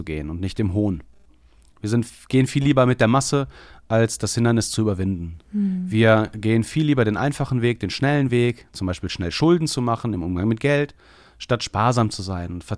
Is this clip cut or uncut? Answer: uncut